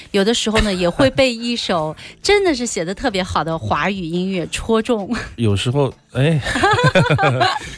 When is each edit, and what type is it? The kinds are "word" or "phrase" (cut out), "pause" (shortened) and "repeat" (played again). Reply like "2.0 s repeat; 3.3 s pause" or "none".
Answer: none